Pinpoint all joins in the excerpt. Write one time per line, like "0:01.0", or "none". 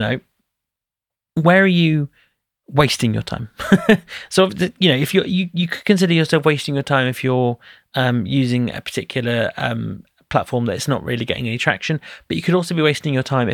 none